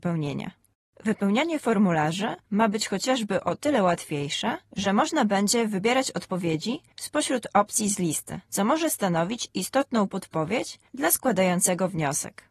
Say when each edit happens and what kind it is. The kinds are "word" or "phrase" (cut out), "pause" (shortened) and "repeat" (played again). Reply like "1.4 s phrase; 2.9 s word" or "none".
none